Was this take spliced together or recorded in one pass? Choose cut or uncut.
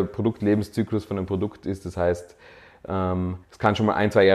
cut